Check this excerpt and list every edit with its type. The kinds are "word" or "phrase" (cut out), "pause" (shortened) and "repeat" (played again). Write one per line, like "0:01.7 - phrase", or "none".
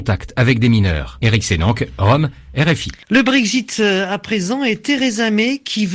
0:03.0 - pause